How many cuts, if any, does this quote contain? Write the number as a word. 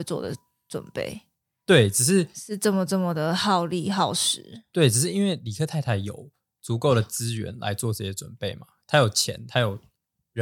zero